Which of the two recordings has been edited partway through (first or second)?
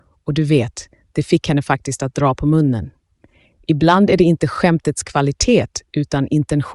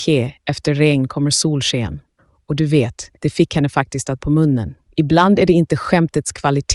second